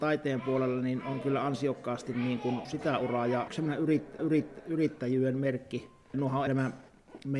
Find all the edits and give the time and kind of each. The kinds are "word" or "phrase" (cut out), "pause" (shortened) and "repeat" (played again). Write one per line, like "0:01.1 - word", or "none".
0:02.6 - word
0:03.5 - phrase
0:04.2 - repeat
0:06.5 - word